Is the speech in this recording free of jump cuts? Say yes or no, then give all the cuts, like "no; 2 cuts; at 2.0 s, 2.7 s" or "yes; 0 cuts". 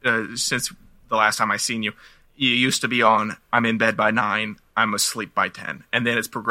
yes; 0 cuts